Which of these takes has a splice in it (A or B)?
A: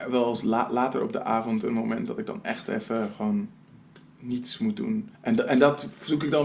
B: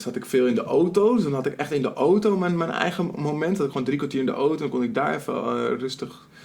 A